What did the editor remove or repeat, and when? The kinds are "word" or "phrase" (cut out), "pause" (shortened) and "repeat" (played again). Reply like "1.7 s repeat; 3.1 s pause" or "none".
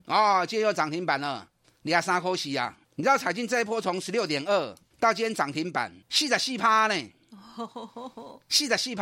1.6 s pause; 2.8 s pause; 4.9 s pause; 6.0 s pause